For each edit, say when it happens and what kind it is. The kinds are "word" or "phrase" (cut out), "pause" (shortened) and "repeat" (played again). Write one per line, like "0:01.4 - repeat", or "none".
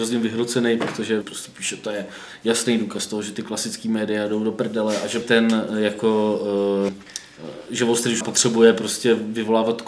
0:01.2 - phrase
0:05.2 - phrase
0:06.9 - word
0:08.2 - word